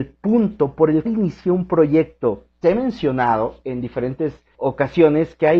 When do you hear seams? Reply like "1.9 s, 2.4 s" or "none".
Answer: 1.0 s, 2.5 s, 4.5 s